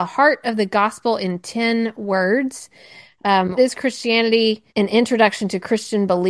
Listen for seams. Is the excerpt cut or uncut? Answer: cut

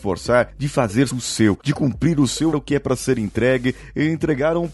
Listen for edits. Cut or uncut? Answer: cut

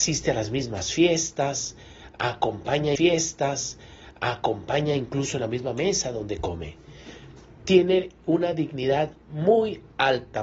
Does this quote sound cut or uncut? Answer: cut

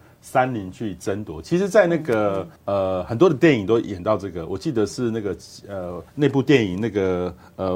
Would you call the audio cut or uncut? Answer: cut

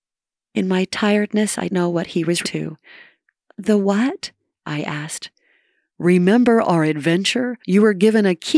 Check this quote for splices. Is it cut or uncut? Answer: cut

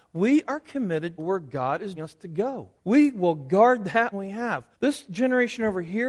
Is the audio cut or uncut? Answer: cut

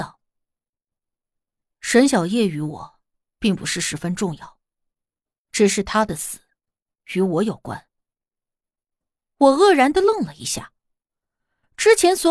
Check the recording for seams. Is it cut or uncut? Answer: uncut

